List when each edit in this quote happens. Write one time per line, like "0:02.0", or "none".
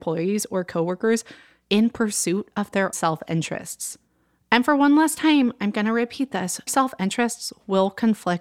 0:02.9
0:06.7